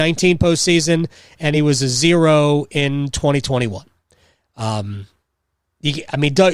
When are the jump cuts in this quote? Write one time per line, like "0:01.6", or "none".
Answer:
none